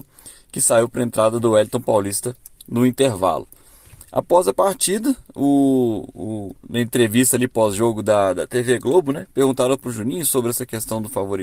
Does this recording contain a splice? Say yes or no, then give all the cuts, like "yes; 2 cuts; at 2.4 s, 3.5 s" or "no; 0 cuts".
yes; 1 cut; at 6.6 s